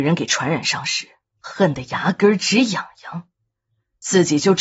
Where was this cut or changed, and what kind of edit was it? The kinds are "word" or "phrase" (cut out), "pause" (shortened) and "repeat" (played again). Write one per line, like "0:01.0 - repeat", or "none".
none